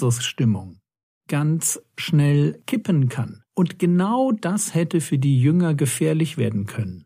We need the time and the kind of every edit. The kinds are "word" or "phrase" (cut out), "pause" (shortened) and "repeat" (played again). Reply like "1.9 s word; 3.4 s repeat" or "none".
3.5 s pause